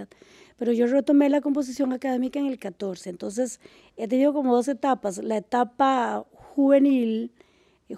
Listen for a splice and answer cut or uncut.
uncut